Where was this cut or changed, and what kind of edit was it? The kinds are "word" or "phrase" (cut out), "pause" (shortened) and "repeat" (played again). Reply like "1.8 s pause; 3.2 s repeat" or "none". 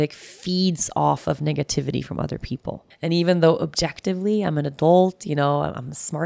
2.9 s pause

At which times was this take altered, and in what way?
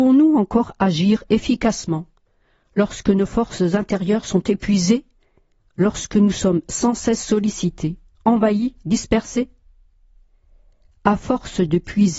none

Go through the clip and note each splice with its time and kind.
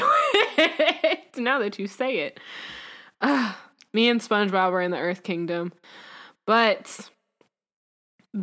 none

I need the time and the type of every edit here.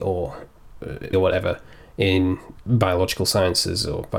1.1 s word; 2.6 s pause

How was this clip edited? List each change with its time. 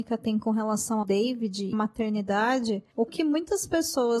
1.0 s word; 1.7 s word; 3.1 s word

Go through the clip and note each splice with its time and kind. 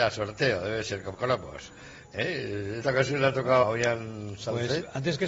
1.1 s word; 2.8 s word; 3.6 s word

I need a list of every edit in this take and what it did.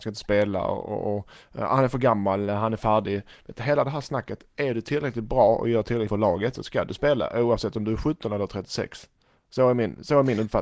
6.1 s word

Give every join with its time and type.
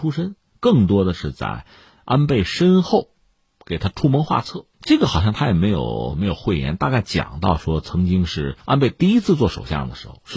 4.7 s pause; 8.6 s pause

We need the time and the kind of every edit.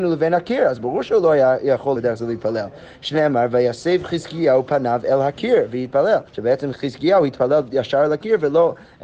2.0 s phrase; 6.3 s pause

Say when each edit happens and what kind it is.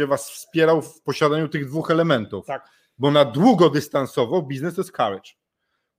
none

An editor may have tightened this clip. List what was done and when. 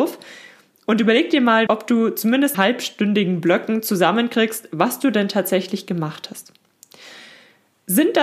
1.7 s word; 2.5 s word

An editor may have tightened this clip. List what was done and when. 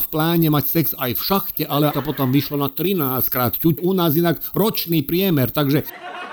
1.9 s phrase; 3.8 s phrase

